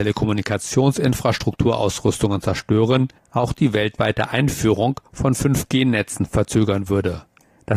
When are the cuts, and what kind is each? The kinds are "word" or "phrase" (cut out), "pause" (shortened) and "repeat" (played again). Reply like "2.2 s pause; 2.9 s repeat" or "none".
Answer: 3.2 s pause

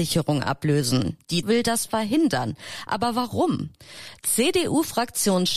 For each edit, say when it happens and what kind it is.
1.4 s word

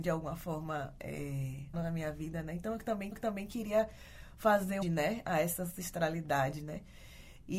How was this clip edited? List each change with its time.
1.7 s word; 3.1 s repeat; 4.8 s phrase

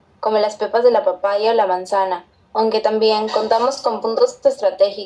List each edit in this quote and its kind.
none

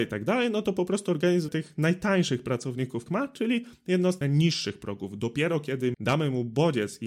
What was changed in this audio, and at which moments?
1.5 s word; 3.1 s word; 4.2 s word; 5.9 s word

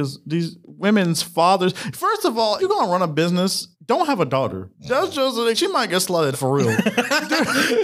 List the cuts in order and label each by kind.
2.6 s word; 3.7 s pause; 4.7 s pause; 5.5 s word; 6.3 s word

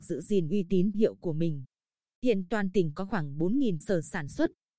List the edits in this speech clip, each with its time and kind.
0.9 s word; 3.8 s word

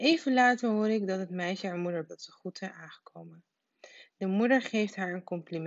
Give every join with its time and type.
2.1 s phrase

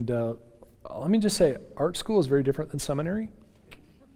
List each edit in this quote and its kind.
none

